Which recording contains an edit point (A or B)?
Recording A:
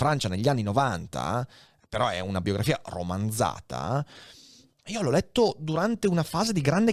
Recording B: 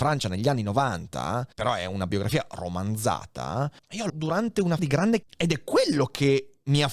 B